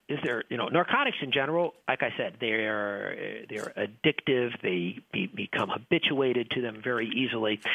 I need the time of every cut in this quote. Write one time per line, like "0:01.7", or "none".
0:01.8